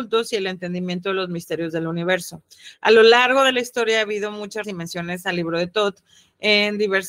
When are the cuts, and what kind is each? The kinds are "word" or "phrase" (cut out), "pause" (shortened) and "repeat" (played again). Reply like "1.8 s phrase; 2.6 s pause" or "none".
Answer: 4.6 s word